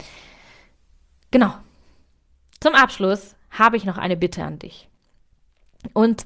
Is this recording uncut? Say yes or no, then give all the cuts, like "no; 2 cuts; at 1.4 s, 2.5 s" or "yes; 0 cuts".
yes; 0 cuts